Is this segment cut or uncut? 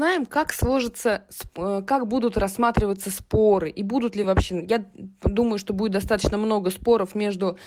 uncut